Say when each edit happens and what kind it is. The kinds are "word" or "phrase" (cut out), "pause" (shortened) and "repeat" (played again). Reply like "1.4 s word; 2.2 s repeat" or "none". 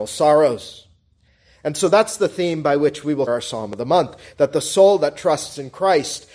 3.3 s word

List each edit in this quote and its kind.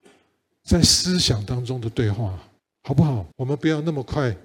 2.6 s pause; 3.3 s pause

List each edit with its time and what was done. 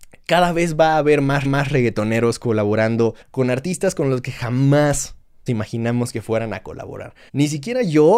1.4 s repeat; 3.2 s pause; 5.5 s word; 7.3 s pause

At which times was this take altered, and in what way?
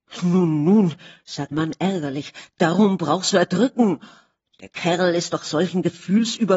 1.5 s word; 3.3 s phrase

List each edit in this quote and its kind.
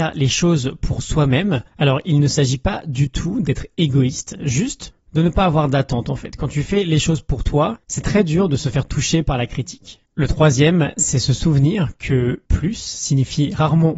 1.7 s pause; 7.8 s pause; 10.0 s pause; 12.5 s pause

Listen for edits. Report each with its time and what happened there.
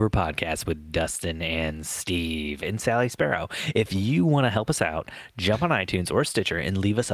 none

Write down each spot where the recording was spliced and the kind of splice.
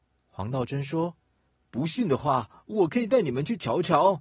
1.2 s pause

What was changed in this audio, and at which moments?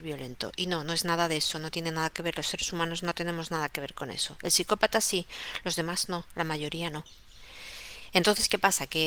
none

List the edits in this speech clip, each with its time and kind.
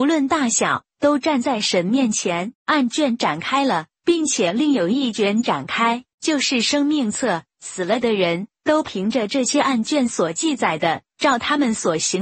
2.6 s pause

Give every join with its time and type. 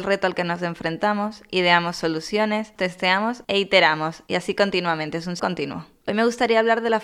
2.8 s word; 5.4 s word

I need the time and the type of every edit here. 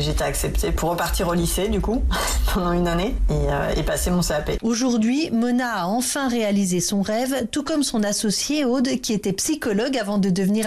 none

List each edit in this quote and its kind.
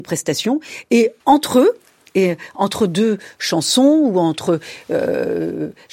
1.2 s pause; 2.0 s pause

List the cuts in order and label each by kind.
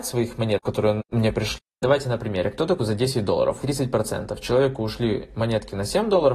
2.8 s phrase; 3.6 s phrase

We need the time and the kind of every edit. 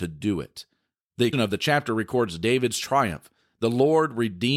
1.3 s word

